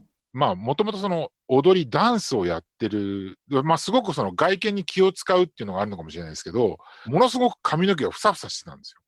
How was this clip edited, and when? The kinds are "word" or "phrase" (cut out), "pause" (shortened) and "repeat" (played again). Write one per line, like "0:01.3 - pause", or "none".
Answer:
0:07.0 - phrase